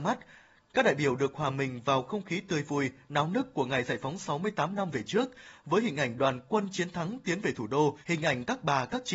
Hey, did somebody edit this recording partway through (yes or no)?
yes